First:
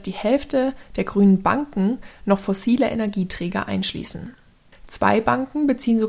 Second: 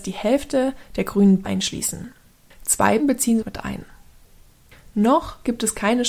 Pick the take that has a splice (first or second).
second